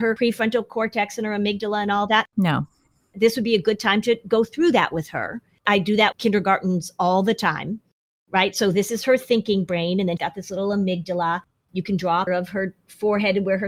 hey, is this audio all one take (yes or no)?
no